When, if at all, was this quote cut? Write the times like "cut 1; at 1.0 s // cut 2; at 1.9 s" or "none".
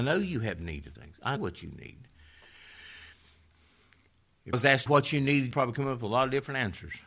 cut 1; at 0.9 s // cut 2; at 1.4 s // cut 3; at 4.5 s // cut 4; at 4.9 s // cut 5; at 5.5 s